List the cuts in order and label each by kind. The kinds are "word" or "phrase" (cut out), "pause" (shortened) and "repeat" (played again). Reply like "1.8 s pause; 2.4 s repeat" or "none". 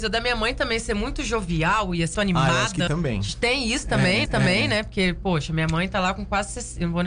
2.1 s word; 2.9 s word; 4.2 s repeat